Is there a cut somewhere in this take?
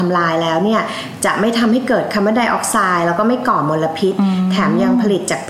no; 0 cuts

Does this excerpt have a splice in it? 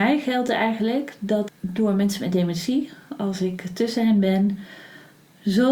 yes; 1 cut; at 1.5 s

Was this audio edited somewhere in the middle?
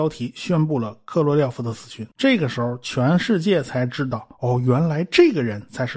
yes; 1 cut; at 2.1 s

